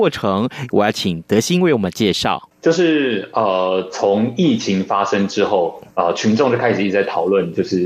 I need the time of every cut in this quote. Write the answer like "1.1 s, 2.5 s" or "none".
5.9 s